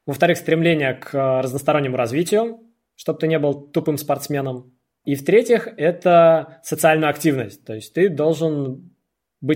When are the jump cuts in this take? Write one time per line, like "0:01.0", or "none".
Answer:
none